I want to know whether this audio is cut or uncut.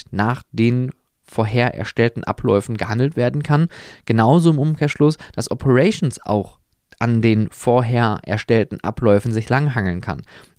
uncut